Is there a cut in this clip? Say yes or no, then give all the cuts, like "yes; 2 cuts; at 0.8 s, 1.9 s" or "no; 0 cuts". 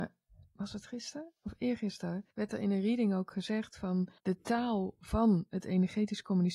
yes; 2 cuts; at 2.3 s, 4.2 s